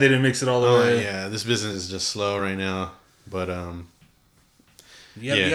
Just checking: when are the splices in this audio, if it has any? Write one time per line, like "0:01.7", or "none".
none